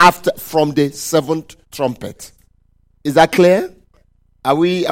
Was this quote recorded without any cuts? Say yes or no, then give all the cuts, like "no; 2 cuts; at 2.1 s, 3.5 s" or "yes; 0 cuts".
no; 1 cut; at 1.6 s